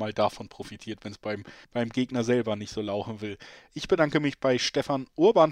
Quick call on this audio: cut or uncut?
cut